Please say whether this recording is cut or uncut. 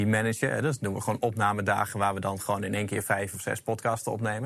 uncut